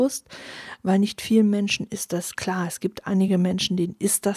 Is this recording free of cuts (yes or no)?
yes